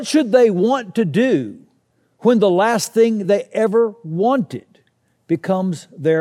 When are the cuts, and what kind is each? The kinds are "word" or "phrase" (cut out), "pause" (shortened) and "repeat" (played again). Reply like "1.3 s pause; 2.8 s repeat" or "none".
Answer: none